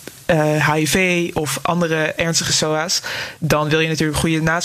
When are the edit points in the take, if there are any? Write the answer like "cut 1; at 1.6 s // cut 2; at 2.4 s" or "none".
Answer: none